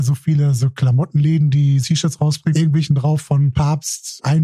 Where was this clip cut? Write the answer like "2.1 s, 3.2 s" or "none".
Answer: 1.8 s, 2.5 s, 2.9 s

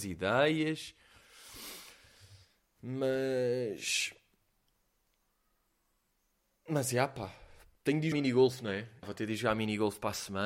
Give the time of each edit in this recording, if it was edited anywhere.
8.1 s, 9.0 s

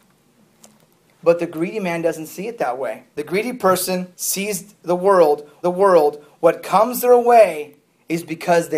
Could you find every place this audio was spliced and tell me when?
3.1 s, 4.1 s, 5.6 s

